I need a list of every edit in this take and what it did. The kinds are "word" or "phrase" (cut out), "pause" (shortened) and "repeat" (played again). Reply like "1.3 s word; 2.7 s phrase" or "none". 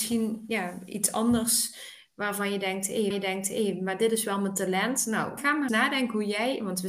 3.1 s repeat; 5.4 s word; 5.7 s word